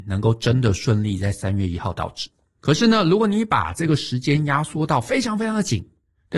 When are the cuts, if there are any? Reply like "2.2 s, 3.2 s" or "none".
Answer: 2.5 s

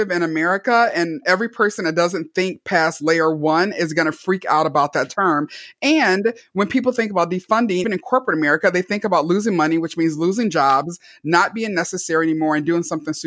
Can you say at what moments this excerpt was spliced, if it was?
7.8 s

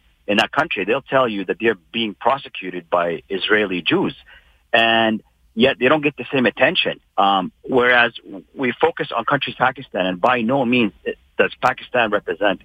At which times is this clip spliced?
7.1 s, 9.5 s

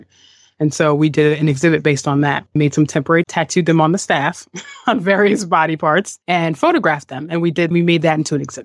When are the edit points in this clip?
2.5 s, 3.2 s, 6.2 s, 7.7 s

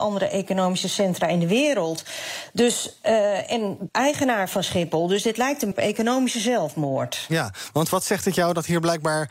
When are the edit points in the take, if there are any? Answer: 3.9 s, 5.7 s

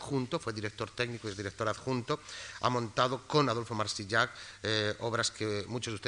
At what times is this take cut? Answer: none

